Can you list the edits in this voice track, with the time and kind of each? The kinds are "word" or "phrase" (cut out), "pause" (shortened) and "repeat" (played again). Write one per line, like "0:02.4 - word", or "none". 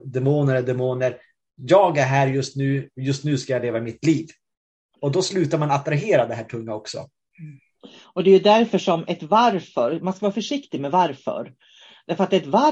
none